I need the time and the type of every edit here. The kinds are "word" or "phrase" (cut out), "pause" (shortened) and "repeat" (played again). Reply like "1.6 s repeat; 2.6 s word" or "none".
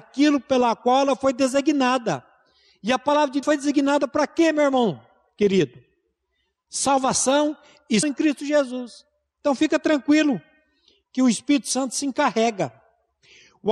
3.4 s word; 8.0 s word